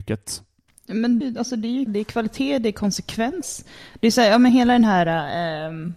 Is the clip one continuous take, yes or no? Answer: no